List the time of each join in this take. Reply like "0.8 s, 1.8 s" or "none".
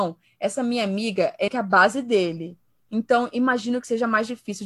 1.5 s